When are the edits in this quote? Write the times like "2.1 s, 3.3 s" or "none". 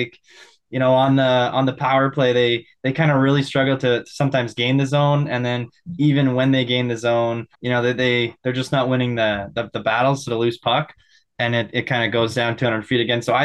7.5 s